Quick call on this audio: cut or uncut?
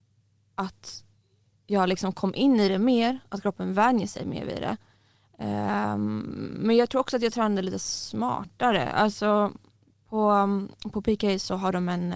uncut